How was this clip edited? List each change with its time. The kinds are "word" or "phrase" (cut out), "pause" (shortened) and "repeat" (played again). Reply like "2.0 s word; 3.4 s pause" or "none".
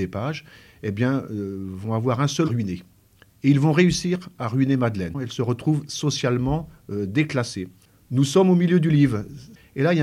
2.4 s phrase